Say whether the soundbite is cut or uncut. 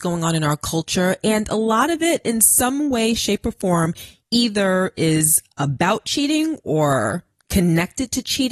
uncut